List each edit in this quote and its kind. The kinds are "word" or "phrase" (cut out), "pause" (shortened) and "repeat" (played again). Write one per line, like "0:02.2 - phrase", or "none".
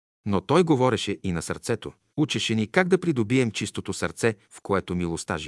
0:02.1 - pause
0:04.4 - pause

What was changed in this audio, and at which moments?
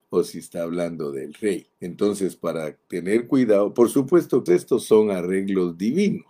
0:01.7 - pause
0:02.8 - pause
0:04.5 - phrase

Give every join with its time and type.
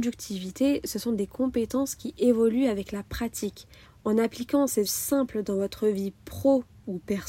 0:03.8 - pause
0:04.9 - word

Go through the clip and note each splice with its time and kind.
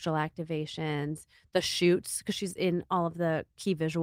none

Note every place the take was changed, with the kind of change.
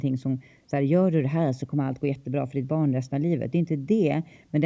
none

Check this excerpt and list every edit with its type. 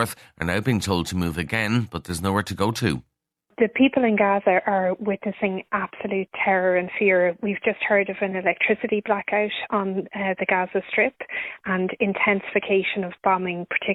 none

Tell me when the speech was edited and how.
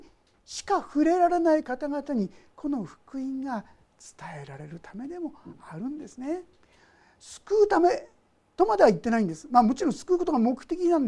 none

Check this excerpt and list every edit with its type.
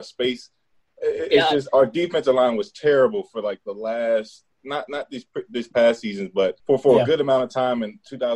0:04.5 - pause
0:06.6 - pause

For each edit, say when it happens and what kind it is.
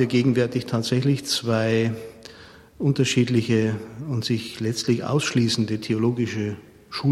none

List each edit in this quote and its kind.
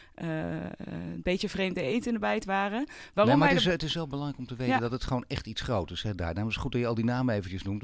none

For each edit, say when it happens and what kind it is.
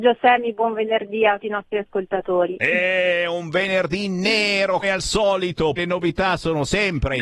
0:01.4 - word
0:04.8 - word
0:05.8 - word

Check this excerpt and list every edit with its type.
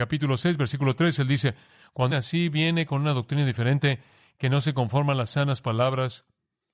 0:02.1 - word

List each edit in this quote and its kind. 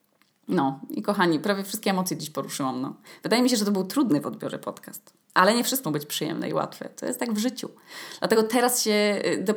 0:05.2 - pause
0:05.8 - word

